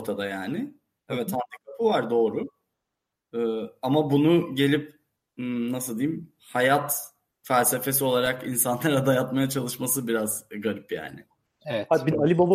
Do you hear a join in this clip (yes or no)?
no